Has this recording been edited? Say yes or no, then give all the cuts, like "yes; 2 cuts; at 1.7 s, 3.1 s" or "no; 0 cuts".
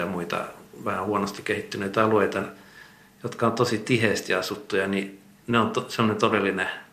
no; 0 cuts